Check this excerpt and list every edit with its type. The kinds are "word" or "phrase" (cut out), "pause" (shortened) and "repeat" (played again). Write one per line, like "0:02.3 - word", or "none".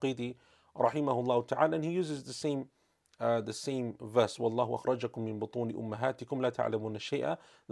none